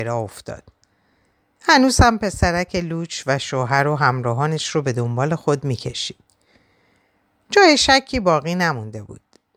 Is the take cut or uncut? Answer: uncut